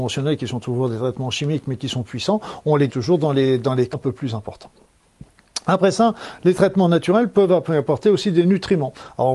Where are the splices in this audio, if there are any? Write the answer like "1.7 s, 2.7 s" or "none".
2.9 s, 3.9 s